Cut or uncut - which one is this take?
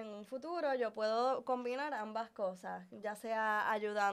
uncut